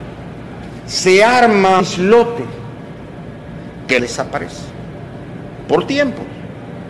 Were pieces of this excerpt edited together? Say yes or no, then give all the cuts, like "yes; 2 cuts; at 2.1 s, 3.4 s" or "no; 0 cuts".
yes; 2 cuts; at 1.8 s, 4.0 s